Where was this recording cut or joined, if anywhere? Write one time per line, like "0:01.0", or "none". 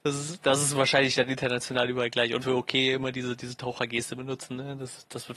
0:02.4

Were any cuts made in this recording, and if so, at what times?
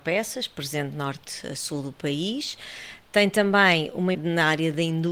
0:04.1

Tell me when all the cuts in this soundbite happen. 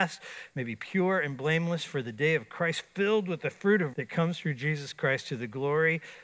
0:03.9

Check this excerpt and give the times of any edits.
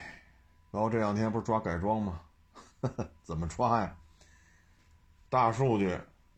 0:02.7

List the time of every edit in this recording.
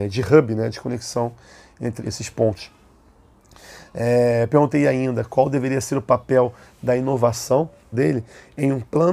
0:02.0
0:07.9

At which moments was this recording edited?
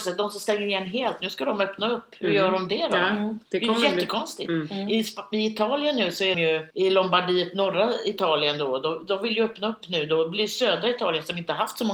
0:03.5
0:06.3
0:06.7

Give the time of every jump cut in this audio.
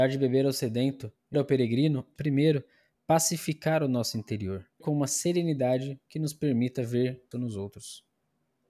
0:01.3
0:02.2
0:04.8
0:07.3

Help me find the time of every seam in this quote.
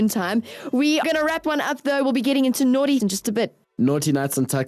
0:01.0
0:01.4
0:03.0

